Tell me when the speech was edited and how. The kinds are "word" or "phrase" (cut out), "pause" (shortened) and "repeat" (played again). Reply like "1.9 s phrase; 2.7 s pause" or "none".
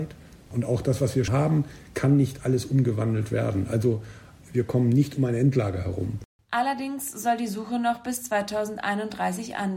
1.3 s word